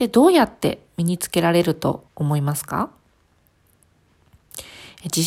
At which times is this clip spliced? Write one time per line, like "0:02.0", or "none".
0:02.1